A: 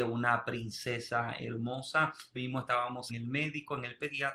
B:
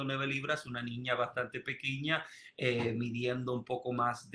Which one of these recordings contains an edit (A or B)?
A